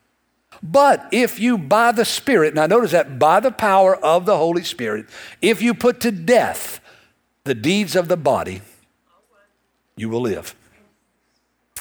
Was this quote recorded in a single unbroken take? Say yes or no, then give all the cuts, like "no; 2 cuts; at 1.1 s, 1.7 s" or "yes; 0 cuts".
yes; 0 cuts